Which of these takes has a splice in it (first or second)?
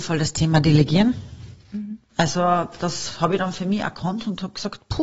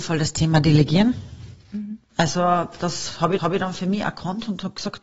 second